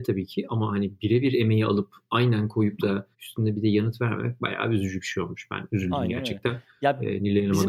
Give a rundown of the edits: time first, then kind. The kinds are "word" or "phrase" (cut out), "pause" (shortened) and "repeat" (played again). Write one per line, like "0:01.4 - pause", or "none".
0:03.1 - pause